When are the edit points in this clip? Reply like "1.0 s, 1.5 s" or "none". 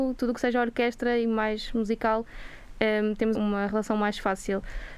3.3 s